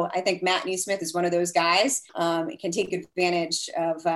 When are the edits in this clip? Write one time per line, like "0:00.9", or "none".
0:02.1